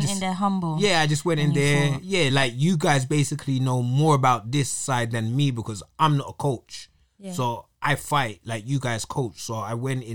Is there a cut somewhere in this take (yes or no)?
no